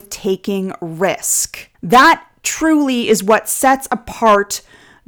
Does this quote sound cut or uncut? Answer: cut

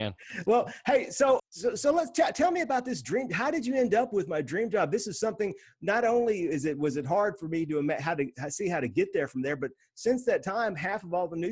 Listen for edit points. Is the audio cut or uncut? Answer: cut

